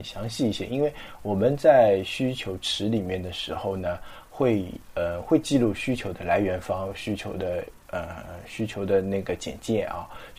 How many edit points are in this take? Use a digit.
1